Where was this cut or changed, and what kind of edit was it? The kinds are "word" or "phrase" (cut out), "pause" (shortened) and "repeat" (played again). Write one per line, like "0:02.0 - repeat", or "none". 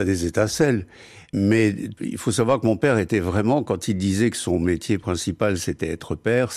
none